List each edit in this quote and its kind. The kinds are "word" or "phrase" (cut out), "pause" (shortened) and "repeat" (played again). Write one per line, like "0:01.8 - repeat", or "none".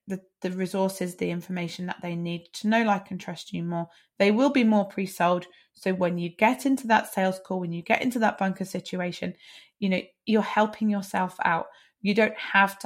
none

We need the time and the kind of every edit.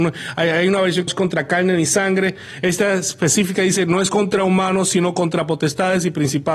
0:01.1 - phrase

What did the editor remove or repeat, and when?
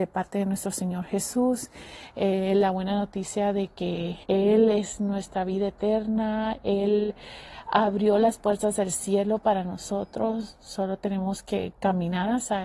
0:04.2 - pause

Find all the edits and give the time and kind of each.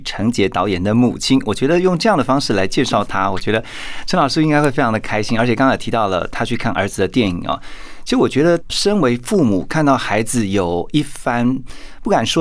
0:08.7 - word

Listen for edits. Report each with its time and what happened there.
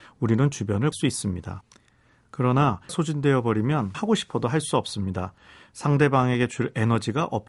0:00.9 - word
0:02.9 - word
0:03.9 - word

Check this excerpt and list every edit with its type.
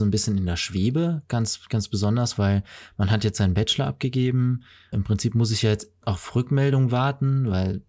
0:04.9 - word

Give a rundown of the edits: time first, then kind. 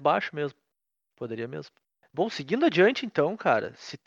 none

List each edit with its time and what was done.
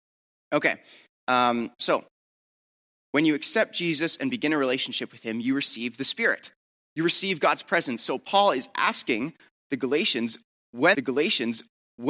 0:10.9 - repeat

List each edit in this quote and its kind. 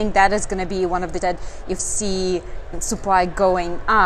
0:01.2 - word
0:01.8 - word
0:02.7 - word

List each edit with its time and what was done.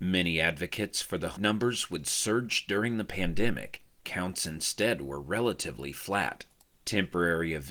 0:01.4 - phrase

